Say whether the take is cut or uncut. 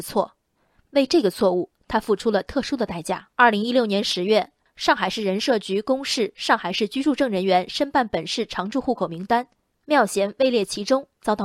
cut